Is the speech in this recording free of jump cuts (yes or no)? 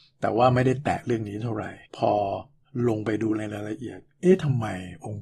no